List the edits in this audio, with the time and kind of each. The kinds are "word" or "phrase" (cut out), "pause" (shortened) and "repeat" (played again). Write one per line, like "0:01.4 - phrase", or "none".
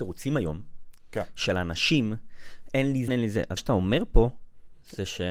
0:03.1 - word
0:03.6 - word